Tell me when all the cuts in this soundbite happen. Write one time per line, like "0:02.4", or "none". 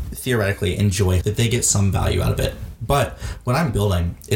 0:01.2